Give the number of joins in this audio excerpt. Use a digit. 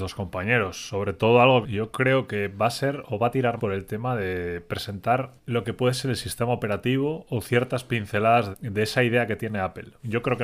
4